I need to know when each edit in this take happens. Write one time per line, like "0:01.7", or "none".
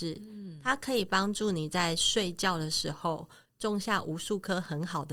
none